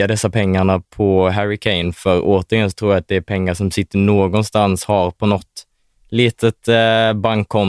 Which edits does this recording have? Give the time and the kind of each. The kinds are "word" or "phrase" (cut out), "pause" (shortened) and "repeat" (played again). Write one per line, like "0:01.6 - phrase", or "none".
none